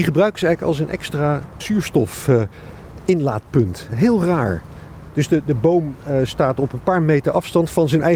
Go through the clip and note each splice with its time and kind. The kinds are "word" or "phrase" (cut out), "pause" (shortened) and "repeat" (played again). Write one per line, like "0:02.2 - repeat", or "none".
0:01.6 - word